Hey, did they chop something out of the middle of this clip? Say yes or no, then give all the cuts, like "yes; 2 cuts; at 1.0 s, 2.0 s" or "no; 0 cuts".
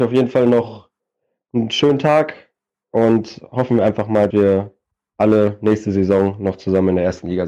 yes; 1 cut; at 4.3 s